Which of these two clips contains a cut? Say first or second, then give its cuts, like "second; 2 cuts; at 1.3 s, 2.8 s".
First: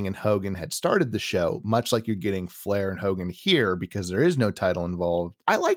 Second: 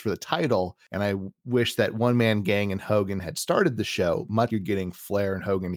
second; 1 cut; at 4.5 s